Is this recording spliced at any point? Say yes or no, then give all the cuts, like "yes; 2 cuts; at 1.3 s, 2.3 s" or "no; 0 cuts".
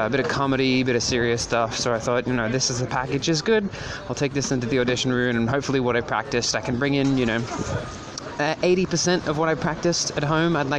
no; 0 cuts